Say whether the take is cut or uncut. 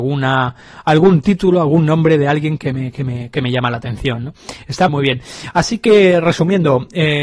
cut